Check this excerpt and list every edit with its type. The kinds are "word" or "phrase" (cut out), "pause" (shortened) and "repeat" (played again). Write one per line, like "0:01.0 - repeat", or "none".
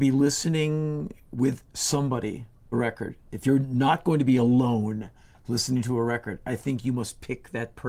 0:02.7 - word